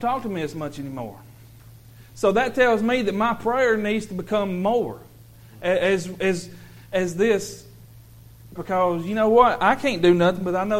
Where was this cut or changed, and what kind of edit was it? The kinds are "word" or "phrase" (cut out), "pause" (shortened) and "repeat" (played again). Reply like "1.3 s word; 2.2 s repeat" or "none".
8.6 s word